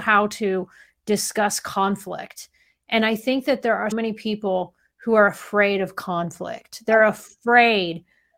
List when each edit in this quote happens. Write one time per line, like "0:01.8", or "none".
0:03.9